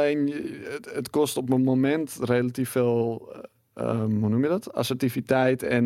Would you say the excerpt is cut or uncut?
uncut